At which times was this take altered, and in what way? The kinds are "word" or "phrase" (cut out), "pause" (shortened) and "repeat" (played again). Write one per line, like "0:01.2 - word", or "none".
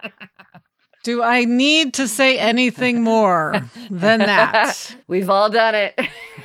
0:05.0 - pause